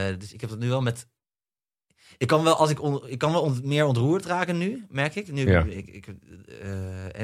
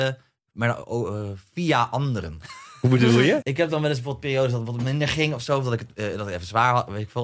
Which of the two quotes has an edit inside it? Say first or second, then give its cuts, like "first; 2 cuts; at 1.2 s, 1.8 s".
second; 1 cut; at 3.4 s